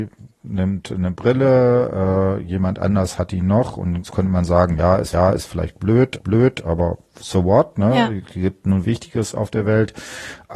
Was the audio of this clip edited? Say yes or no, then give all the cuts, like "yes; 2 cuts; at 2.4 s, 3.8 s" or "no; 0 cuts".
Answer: yes; 3 cuts; at 5.1 s, 6.2 s, 8.8 s